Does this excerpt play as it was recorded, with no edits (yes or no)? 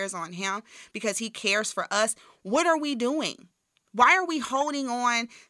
yes